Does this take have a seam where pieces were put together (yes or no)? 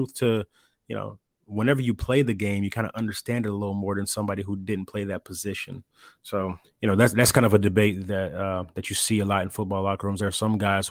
yes